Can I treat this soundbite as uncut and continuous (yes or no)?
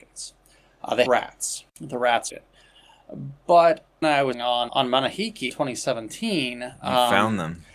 no